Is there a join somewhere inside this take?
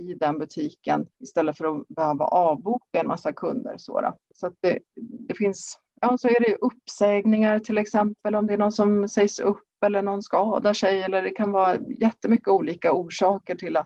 yes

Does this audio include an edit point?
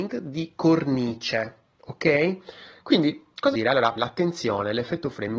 yes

